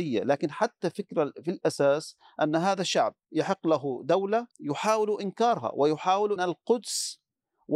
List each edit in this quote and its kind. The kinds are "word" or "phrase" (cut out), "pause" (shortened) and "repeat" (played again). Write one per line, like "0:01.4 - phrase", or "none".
0:03.2 - pause
0:04.5 - pause
0:06.4 - phrase